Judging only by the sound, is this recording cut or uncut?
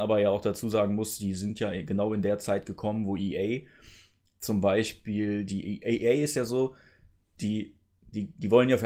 uncut